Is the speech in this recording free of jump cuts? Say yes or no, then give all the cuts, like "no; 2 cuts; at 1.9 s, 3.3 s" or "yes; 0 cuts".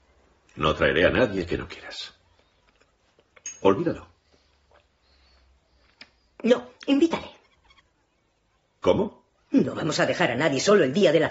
no; 1 cut; at 6.8 s